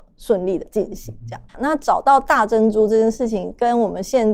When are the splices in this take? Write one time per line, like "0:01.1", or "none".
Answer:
0:01.5